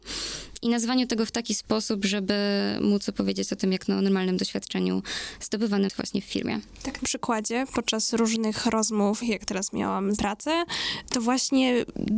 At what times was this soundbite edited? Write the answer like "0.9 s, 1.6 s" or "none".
5.9 s, 7.0 s, 9.2 s, 10.2 s